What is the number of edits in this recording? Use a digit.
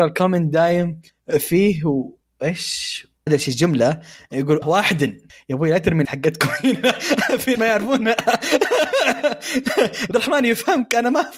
5